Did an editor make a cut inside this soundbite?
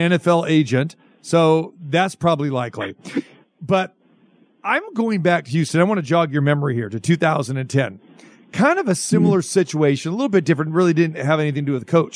no; 0 cuts

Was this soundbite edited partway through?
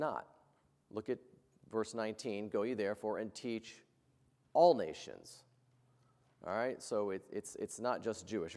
no; 0 cuts

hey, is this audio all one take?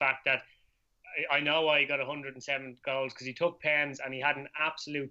yes; 0 cuts

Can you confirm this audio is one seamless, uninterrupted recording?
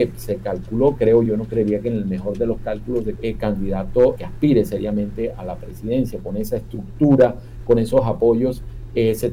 no; 3 cuts; at 1.3 s, 3.2 s, 4.2 s

